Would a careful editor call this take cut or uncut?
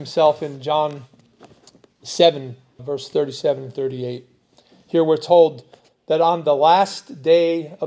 cut